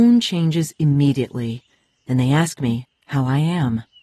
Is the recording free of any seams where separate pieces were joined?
yes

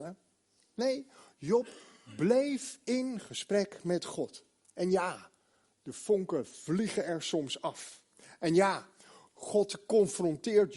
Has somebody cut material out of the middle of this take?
no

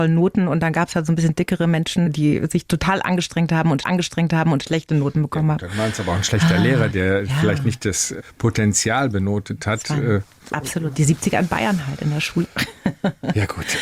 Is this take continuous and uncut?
no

